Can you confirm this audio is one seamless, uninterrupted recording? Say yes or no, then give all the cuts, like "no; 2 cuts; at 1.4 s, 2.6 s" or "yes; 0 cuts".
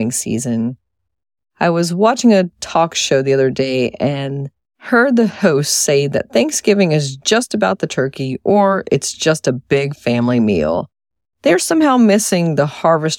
yes; 0 cuts